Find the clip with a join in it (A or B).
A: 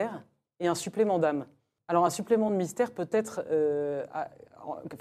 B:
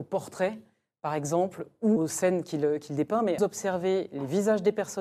B